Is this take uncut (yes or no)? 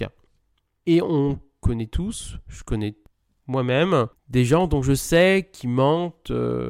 no